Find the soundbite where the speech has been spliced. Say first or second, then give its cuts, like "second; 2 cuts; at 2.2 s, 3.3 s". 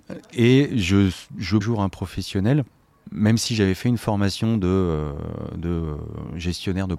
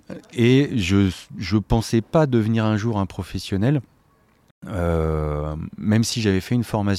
first; 2 cuts; at 1.6 s, 3.0 s